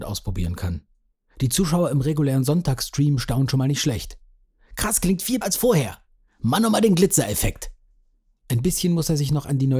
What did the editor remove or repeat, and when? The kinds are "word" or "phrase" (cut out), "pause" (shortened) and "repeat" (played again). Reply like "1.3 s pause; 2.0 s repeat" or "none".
5.4 s word